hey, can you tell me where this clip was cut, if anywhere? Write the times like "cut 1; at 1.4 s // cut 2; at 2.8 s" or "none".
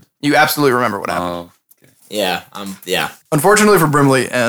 cut 1; at 2.0 s // cut 2; at 3.2 s